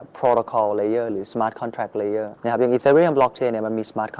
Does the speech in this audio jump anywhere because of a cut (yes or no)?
yes